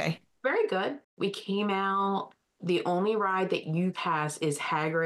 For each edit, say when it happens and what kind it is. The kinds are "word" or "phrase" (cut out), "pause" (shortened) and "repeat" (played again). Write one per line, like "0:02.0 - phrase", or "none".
0:03.9 - phrase